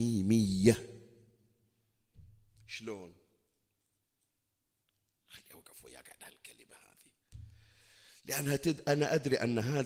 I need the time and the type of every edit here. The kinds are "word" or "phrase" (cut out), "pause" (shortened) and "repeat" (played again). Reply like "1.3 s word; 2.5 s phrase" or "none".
none